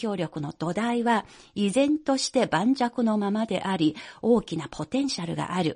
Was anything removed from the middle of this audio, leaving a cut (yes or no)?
no